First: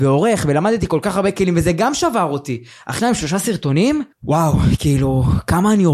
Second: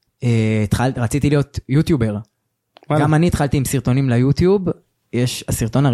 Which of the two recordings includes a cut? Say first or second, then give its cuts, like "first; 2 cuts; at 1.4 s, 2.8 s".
first; 2 cuts; at 3.0 s, 4.1 s